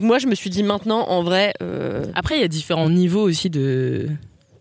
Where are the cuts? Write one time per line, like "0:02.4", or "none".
none